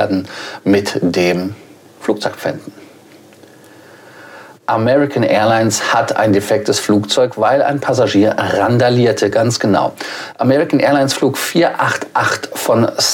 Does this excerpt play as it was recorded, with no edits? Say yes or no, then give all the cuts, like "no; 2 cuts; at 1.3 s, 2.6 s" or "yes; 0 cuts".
yes; 0 cuts